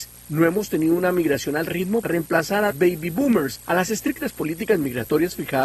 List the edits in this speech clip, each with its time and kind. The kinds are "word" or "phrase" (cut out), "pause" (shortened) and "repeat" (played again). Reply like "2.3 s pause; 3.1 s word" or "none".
2.0 s word; 2.7 s word; 3.7 s word